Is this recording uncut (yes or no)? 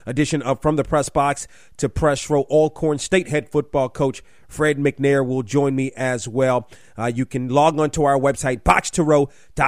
yes